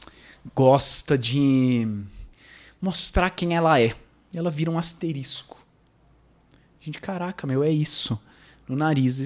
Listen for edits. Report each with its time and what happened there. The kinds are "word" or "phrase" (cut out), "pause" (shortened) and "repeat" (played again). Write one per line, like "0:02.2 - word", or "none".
none